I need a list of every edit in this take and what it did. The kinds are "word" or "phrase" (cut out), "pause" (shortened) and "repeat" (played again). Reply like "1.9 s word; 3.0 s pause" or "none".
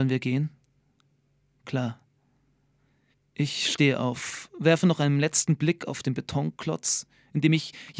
none